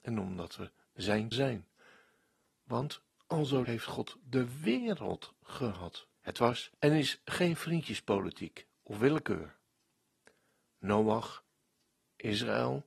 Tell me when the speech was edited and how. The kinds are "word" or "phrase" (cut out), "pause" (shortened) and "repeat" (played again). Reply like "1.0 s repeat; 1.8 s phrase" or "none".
1.3 s word; 3.6 s word; 6.2 s pause; 6.7 s pause